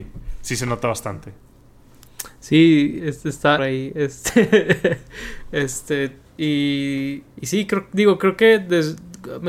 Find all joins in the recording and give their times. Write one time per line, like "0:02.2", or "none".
0:03.0
0:03.6
0:07.3